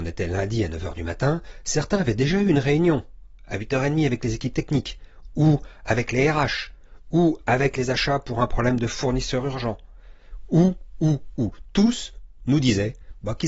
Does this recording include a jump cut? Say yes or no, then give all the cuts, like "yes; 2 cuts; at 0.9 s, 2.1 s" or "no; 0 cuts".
no; 0 cuts